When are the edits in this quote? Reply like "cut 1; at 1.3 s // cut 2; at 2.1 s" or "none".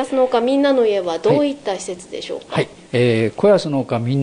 cut 1; at 2.9 s